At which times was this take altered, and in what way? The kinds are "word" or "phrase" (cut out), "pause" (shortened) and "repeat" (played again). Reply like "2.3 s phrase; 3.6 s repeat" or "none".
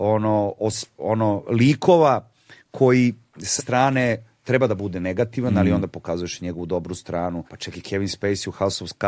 3.6 s word; 7.5 s pause